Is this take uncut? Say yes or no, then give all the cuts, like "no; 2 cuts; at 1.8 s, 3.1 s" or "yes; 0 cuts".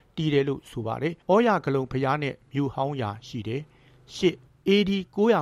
no; 2 cuts; at 1.2 s, 4.5 s